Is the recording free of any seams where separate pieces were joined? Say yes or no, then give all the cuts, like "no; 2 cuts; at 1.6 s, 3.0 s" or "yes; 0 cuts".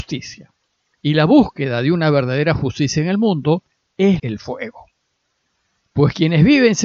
no; 1 cut; at 4.2 s